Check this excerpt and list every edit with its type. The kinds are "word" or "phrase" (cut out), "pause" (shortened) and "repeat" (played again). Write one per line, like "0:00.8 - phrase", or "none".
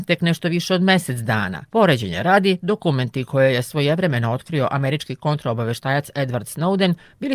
0:01.7 - pause